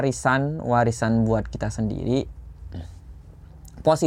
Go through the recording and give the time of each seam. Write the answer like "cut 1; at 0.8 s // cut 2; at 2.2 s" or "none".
none